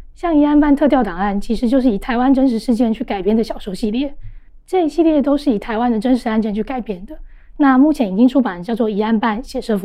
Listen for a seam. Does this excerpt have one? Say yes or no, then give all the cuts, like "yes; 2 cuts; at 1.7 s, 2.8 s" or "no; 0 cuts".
no; 0 cuts